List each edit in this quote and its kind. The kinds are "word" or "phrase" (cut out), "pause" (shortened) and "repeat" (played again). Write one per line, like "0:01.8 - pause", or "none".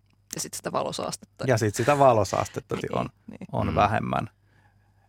0:02.8 - word